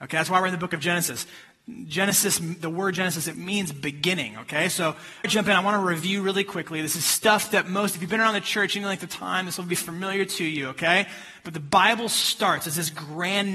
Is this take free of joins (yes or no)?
no